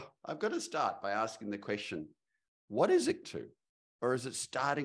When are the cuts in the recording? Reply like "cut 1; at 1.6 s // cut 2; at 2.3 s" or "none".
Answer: cut 1; at 3.2 s